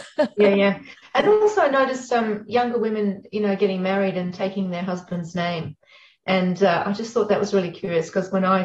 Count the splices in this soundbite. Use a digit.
0